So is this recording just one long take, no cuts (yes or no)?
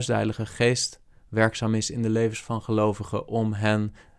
yes